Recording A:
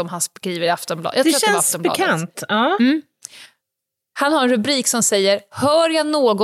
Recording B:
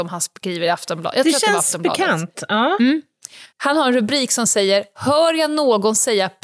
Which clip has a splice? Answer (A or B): B